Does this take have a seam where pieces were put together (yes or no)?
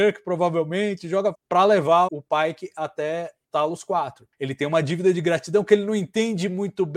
yes